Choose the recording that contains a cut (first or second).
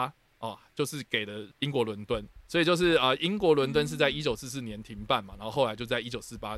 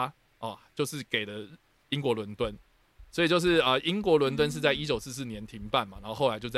first